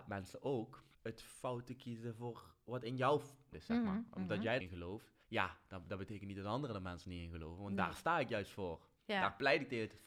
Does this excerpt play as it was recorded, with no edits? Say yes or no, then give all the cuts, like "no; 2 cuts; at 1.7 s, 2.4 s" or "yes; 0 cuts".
no; 4 cuts; at 0.9 s, 3.5 s, 4.6 s, 5.2 s